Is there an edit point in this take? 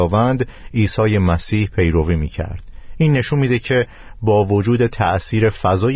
no; 0 cuts

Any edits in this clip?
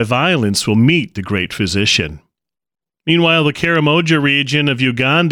no; 0 cuts

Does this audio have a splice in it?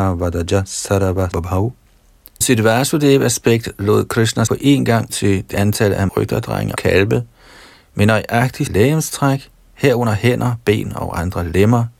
yes; 8 cuts; at 1.3 s, 2.4 s, 4.5 s, 5.1 s, 5.5 s, 6.1 s, 6.8 s, 8.7 s

